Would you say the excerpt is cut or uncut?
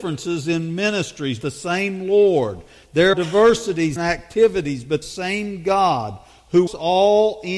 cut